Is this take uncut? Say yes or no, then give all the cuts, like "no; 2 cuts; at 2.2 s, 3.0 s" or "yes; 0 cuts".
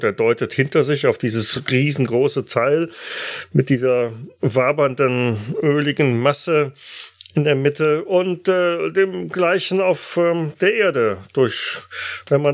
yes; 0 cuts